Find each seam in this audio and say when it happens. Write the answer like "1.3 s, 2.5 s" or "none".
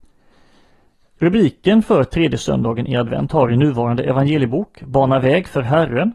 none